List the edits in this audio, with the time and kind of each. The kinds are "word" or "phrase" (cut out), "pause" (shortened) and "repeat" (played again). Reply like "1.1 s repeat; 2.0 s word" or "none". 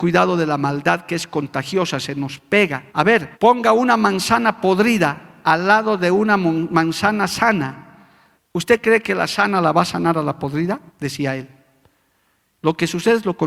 2.9 s pause; 3.3 s pause; 8.4 s pause; 10.9 s pause